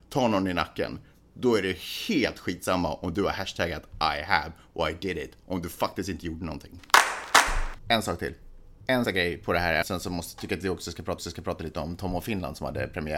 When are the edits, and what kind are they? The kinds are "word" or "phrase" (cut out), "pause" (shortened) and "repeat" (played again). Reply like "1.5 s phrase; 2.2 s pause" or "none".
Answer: 9.0 s word; 9.8 s word; 11.2 s repeat